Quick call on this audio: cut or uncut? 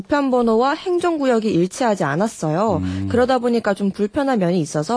uncut